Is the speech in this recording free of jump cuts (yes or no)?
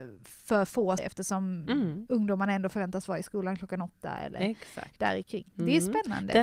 no